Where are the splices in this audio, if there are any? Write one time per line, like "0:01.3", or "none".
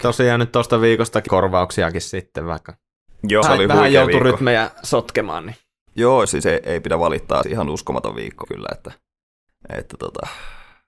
0:01.3
0:03.4
0:06.2
0:07.4
0:08.4